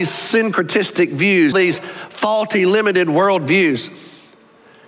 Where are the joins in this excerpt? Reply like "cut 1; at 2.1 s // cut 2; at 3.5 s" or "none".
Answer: cut 1; at 1.5 s